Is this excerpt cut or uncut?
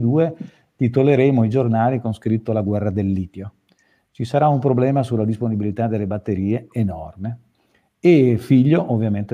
uncut